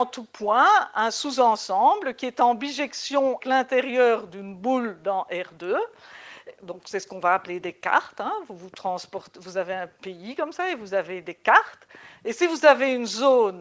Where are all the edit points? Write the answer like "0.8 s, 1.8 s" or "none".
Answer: 3.4 s